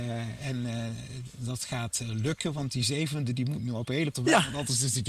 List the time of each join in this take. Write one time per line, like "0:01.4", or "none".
0:04.1